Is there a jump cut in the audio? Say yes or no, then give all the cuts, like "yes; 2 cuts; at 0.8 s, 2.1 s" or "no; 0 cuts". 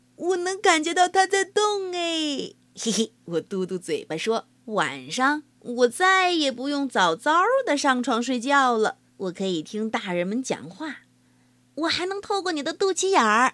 yes; 4 cuts; at 3.2 s, 4.6 s, 5.5 s, 9.1 s